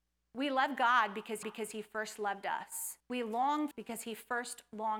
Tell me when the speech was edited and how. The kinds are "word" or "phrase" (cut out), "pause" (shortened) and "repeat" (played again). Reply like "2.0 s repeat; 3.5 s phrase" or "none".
1.4 s repeat; 3.0 s pause; 3.7 s phrase